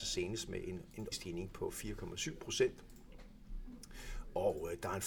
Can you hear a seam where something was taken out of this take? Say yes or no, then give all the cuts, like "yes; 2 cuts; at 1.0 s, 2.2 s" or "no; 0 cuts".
yes; 1 cut; at 1.1 s